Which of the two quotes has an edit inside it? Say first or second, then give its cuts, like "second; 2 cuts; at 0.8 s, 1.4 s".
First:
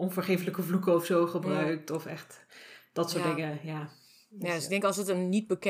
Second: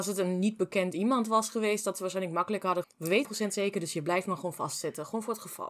second; 2 cuts; at 2.8 s, 3.2 s